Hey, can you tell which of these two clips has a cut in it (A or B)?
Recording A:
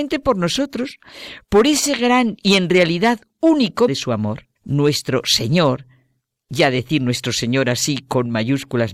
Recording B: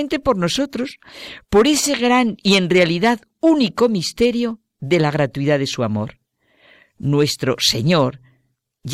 A